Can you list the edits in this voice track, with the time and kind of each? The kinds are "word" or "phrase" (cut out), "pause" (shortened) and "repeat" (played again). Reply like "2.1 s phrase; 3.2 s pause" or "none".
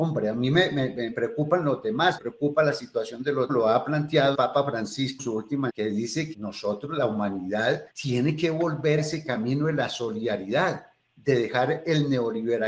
1.1 s word; 2.2 s word; 3.5 s phrase; 4.3 s word; 5.2 s word; 5.7 s word; 6.3 s word; 7.9 s pause; 9.0 s word